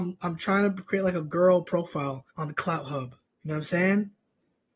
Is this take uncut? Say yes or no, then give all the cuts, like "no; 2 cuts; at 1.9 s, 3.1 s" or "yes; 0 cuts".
no; 2 cuts; at 2.3 s, 3.3 s